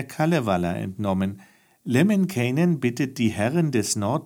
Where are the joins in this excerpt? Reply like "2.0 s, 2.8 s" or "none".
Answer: none